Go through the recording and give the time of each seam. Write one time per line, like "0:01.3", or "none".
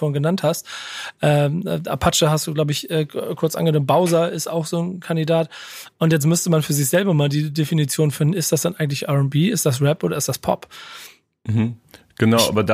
none